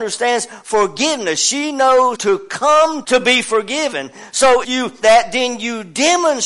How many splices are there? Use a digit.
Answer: 4